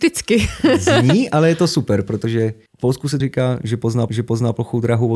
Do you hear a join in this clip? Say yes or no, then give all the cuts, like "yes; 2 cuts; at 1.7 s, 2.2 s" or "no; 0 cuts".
yes; 3 cuts; at 2.7 s, 3.2 s, 4.1 s